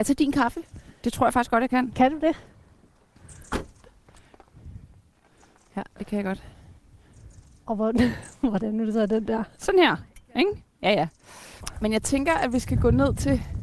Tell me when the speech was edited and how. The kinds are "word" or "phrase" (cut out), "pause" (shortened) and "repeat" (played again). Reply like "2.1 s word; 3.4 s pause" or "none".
none